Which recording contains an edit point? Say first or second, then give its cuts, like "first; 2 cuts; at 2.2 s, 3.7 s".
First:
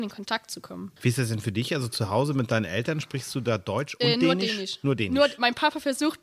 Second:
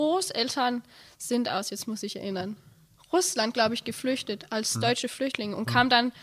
first; 1 cut; at 1.0 s